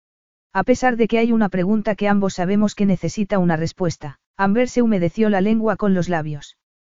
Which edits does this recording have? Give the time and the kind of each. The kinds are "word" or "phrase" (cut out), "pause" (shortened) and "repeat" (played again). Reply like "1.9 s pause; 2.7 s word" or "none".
4.3 s pause